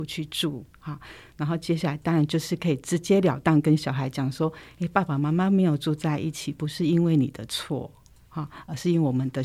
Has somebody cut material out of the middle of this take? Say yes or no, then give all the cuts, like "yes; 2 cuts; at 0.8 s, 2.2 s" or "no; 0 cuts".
no; 0 cuts